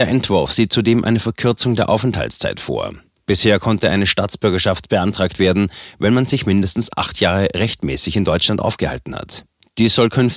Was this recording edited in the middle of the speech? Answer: no; 0 cuts

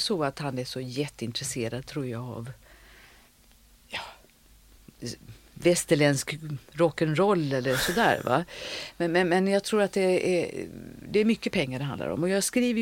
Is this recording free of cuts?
yes; 0 cuts

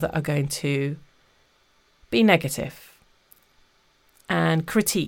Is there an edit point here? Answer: no; 0 cuts

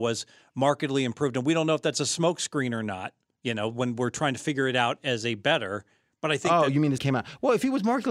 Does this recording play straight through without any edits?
no; 1 cut; at 7.0 s

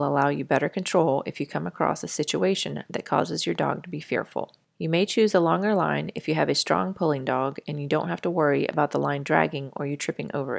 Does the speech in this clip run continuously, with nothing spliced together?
yes; 0 cuts

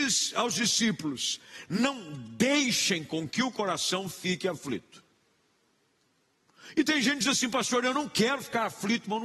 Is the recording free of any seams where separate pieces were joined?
yes; 0 cuts

